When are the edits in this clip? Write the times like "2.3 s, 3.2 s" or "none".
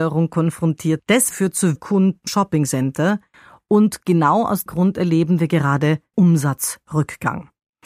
1.0 s, 1.3 s, 1.8 s, 2.3 s, 4.7 s, 6.1 s